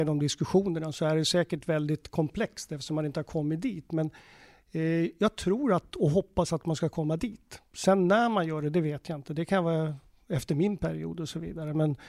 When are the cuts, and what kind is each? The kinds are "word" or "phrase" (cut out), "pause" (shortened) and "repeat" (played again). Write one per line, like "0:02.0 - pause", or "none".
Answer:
none